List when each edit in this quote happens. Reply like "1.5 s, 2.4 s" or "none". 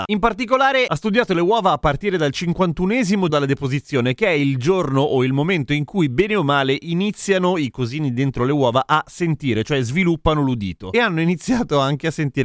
3.3 s